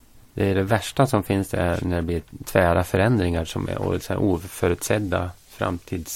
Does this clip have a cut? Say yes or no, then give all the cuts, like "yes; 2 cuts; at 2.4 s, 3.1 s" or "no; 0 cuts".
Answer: no; 0 cuts